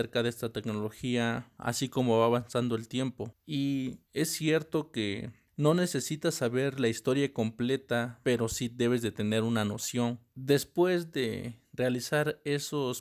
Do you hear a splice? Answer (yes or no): no